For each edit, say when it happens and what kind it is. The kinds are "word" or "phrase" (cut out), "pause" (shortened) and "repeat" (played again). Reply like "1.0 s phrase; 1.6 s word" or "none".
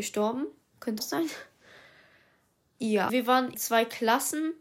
1.0 s word; 3.1 s word; 3.5 s word